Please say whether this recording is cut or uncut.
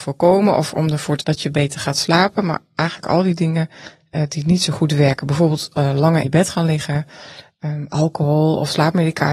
cut